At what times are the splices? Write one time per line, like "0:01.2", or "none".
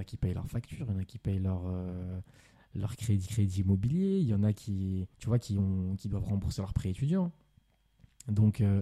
0:03.3
0:05.1